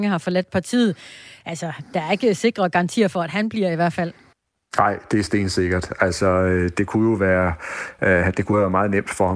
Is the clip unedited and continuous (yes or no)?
no